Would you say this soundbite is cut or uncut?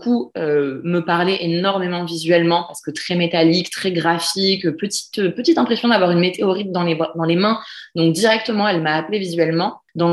uncut